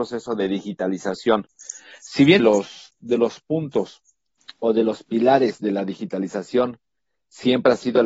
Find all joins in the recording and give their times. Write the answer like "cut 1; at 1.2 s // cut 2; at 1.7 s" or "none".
cut 1; at 2.4 s // cut 2; at 4.3 s